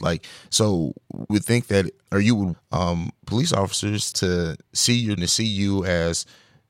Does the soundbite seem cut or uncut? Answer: cut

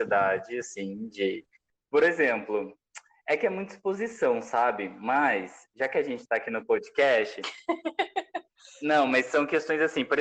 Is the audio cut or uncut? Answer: uncut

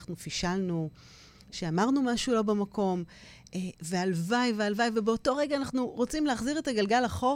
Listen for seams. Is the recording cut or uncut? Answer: uncut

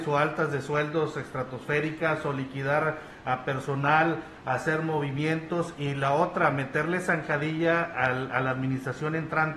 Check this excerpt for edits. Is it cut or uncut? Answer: uncut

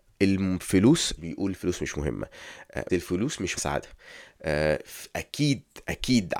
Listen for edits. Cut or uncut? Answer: cut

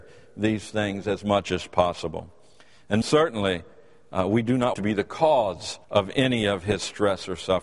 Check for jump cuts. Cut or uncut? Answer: cut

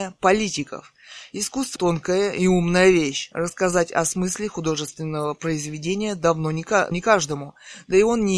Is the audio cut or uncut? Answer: cut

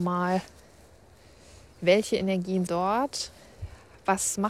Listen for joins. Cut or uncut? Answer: cut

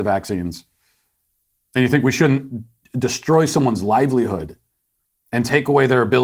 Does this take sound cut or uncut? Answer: uncut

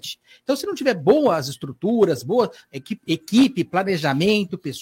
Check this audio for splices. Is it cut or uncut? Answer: uncut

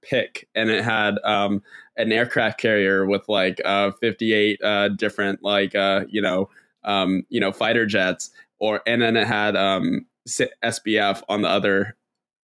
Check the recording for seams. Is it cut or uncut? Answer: uncut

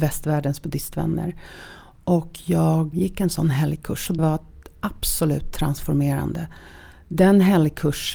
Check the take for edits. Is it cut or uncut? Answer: cut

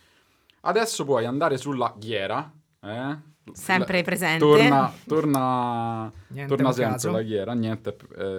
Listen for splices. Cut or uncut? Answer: uncut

